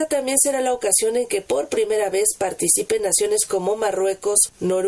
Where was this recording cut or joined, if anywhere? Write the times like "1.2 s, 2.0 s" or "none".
none